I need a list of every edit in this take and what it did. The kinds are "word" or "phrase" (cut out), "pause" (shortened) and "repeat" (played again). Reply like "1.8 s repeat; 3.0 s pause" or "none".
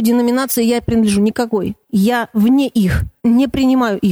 1.8 s pause; 3.2 s pause

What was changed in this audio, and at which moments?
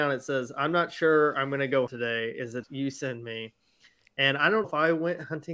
1.9 s word; 2.6 s word; 4.6 s word

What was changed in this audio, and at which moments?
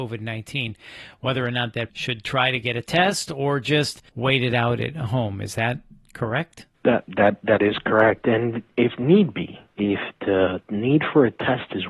1.9 s word; 4.1 s pause; 6.7 s pause; 9.7 s pause

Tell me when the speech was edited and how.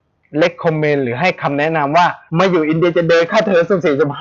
2.3 s pause

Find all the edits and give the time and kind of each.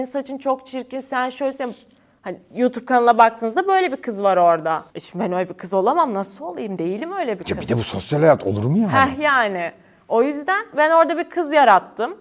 4.9 s pause

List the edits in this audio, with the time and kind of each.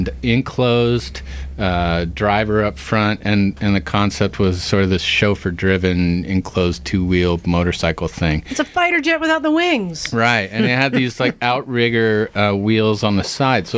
none

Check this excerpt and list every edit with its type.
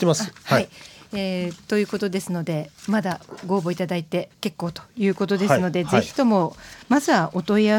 4.3 s pause

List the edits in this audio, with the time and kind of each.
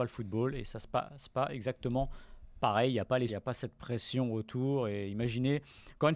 3.3 s word

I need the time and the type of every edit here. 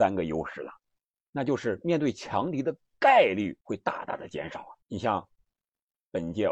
3.6 s pause; 4.8 s pause

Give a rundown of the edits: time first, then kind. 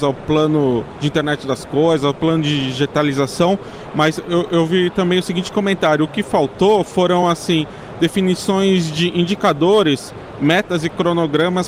none

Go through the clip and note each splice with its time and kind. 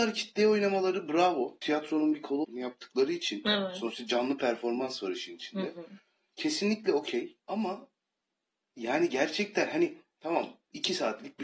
2.4 s word; 7.4 s pause

